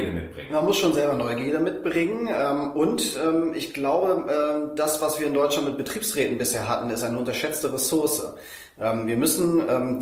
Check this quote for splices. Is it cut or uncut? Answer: uncut